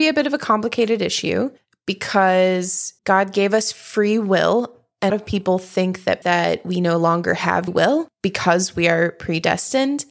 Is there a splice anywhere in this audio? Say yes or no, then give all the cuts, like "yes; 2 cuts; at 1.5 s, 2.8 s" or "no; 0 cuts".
yes; 4 cuts; at 3.0 s, 5.1 s, 6.2 s, 7.7 s